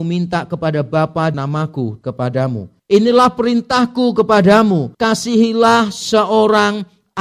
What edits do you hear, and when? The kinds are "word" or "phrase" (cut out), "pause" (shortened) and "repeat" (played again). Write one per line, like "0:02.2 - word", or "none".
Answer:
0:01.3 - word
0:02.0 - word
0:04.9 - pause